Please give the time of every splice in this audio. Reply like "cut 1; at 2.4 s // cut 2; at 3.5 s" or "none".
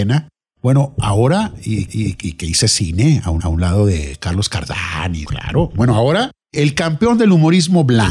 cut 1; at 1.9 s // cut 2; at 3.4 s // cut 3; at 5.2 s // cut 4; at 6.4 s